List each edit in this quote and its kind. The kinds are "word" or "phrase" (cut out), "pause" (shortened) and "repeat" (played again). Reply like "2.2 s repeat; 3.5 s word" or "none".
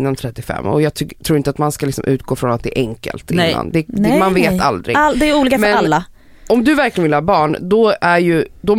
none